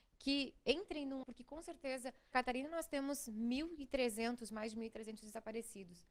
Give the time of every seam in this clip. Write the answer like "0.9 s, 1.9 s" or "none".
1.2 s, 2.3 s

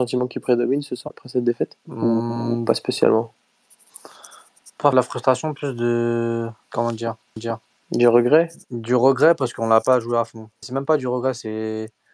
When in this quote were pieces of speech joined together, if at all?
1.1 s, 1.8 s, 4.9 s, 6.6 s, 7.4 s, 10.6 s

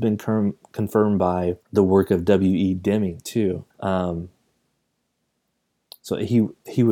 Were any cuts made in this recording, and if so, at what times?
1.6 s, 3.7 s

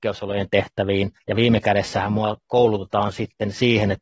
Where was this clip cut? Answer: 1.2 s

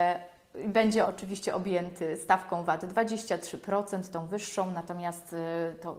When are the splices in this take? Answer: 1.0 s

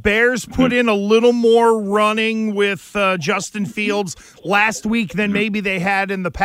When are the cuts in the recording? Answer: none

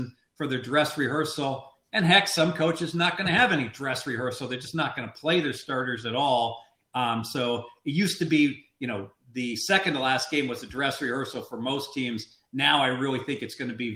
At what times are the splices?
none

